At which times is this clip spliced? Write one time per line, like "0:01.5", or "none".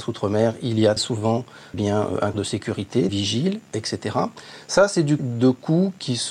0:01.0
0:01.7
0:02.3
0:03.1
0:05.2